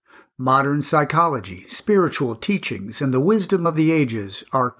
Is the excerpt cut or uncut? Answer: uncut